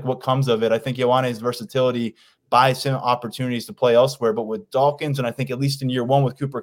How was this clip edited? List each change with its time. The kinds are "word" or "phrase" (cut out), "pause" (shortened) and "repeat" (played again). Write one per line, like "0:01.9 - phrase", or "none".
none